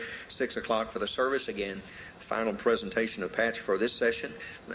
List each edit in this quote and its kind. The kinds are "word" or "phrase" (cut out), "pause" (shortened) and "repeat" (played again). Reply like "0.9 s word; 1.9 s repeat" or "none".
none